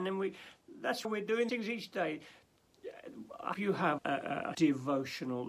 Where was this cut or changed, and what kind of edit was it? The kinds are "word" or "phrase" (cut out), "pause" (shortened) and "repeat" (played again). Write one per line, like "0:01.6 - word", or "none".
0:01.0 - word
0:01.5 - word
0:03.5 - word
0:04.0 - word
0:04.5 - word